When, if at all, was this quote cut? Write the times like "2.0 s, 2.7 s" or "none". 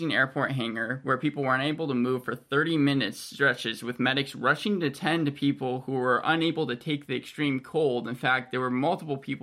none